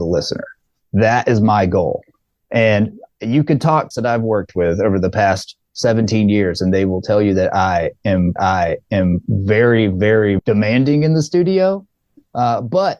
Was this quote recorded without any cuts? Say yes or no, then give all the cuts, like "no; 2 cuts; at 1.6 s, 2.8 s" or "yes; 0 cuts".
no; 3 cuts; at 3.9 s, 8.4 s, 10.4 s